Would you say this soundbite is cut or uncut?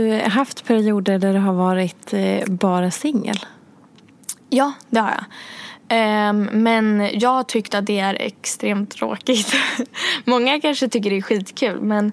uncut